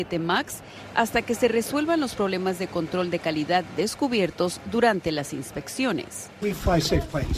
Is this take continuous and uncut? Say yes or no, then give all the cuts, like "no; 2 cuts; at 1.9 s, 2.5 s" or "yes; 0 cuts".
yes; 0 cuts